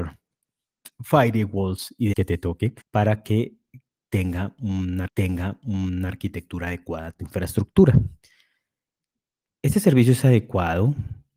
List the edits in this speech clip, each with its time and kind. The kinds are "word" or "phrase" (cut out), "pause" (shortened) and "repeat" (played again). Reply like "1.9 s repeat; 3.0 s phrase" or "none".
2.1 s word; 2.8 s pause; 5.1 s repeat